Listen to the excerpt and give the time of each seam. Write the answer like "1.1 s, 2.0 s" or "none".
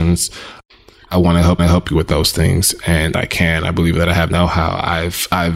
1.6 s, 3.1 s, 4.3 s